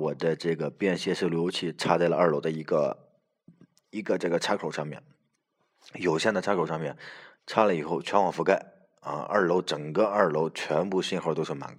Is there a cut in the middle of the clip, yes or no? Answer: no